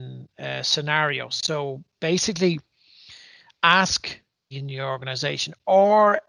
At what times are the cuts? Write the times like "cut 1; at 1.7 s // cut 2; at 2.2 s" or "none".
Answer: cut 1; at 4.5 s